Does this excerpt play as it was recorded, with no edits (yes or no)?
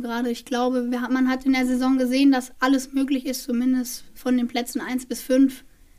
yes